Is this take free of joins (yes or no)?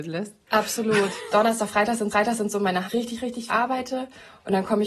no